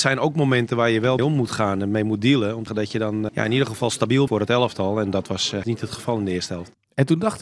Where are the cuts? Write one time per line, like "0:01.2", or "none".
0:01.2
0:02.7
0:03.3
0:04.3
0:05.6